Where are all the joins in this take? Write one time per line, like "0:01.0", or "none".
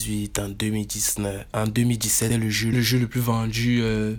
0:02.3
0:02.7